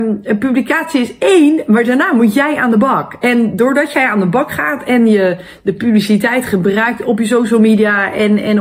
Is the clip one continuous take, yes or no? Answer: yes